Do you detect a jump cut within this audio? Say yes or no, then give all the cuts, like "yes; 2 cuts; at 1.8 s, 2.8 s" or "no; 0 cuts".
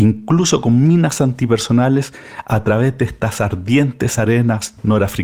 no; 0 cuts